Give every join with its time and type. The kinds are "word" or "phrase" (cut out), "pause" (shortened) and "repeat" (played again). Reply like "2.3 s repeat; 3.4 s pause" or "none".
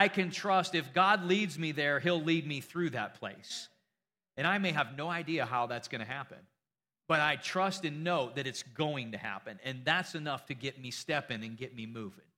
none

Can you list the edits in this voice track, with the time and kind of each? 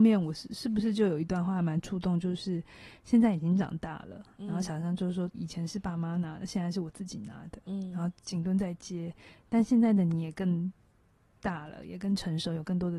5.3 s word

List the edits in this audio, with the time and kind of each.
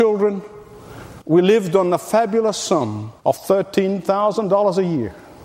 1.2 s pause; 3.2 s pause

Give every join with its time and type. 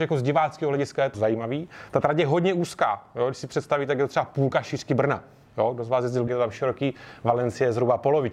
1.1 s word; 6.3 s phrase

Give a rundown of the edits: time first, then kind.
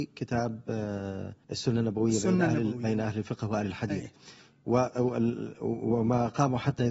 1.4 s pause

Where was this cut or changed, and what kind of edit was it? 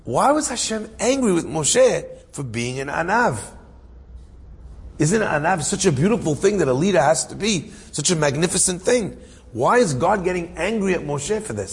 2.2 s pause

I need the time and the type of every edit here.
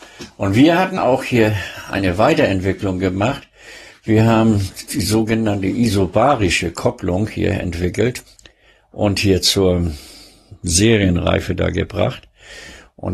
1.0 s phrase; 8.4 s pause

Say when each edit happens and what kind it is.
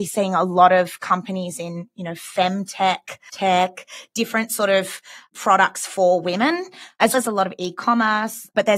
3.3 s word; 7.1 s word

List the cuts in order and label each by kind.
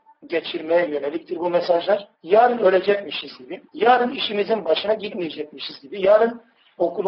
2.1 s pause; 3.7 s pause

